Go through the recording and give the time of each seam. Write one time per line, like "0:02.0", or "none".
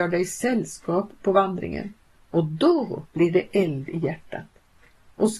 none